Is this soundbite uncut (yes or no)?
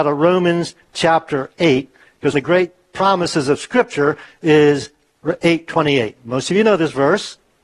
no